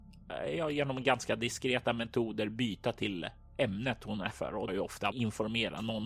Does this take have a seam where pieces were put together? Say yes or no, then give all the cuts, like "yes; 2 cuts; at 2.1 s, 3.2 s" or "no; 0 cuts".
yes; 3 cuts; at 4.3 s, 4.7 s, 5.1 s